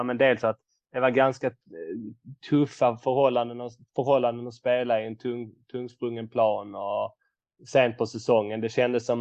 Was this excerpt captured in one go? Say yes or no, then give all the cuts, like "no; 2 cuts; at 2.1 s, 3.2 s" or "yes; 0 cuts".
yes; 0 cuts